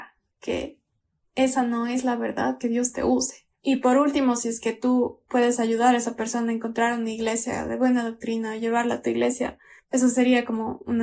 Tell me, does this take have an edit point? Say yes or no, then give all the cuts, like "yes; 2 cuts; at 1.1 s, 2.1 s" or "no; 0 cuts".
no; 0 cuts